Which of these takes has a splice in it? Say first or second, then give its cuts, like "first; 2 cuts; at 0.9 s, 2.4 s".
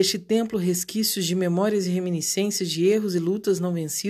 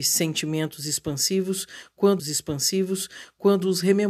second; 1 cut; at 2.2 s